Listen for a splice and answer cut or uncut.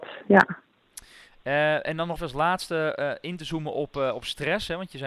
cut